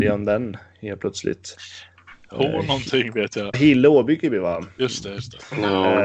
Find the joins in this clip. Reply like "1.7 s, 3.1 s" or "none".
3.5 s